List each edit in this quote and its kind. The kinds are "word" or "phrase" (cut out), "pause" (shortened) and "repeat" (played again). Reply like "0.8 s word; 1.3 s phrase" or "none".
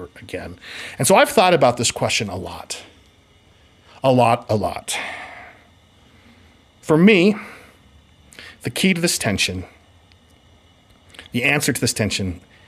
none